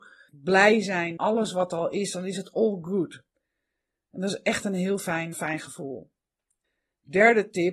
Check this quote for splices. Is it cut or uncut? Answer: cut